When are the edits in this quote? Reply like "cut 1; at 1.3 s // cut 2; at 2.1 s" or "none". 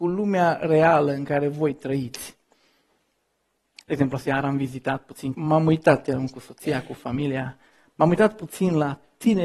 cut 1; at 5.3 s

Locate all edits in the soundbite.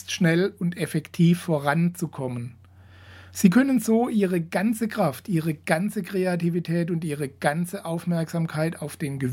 none

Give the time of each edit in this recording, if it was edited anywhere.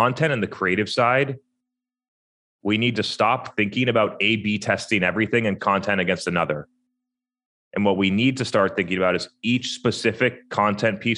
cut 1; at 5.6 s

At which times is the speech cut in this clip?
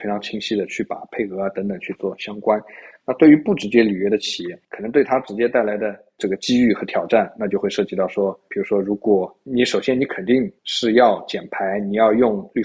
cut 1; at 10.6 s

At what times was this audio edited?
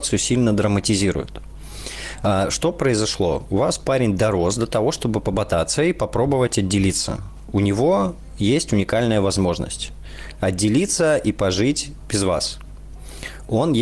none

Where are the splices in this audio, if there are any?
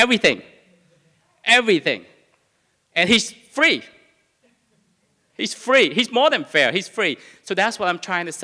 none

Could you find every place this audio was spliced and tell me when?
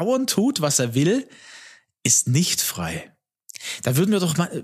none

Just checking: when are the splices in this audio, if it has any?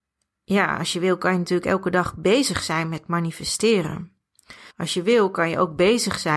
cut 1; at 4.7 s

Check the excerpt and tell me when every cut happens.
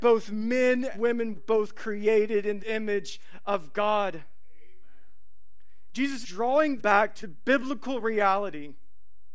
cut 1; at 0.9 s // cut 2; at 1.3 s // cut 3; at 2.6 s // cut 4; at 6.2 s // cut 5; at 6.8 s // cut 6; at 7.2 s

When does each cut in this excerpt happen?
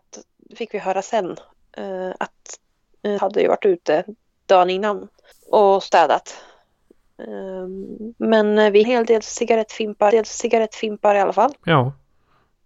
cut 1; at 3.2 s // cut 2; at 4.3 s // cut 3; at 5.3 s // cut 4; at 8.1 s // cut 5; at 8.8 s // cut 6; at 10.1 s // cut 7; at 11.6 s

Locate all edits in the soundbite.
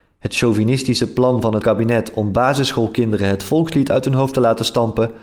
cut 1; at 1.6 s

